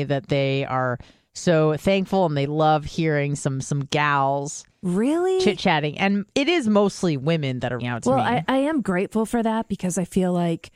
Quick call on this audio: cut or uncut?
cut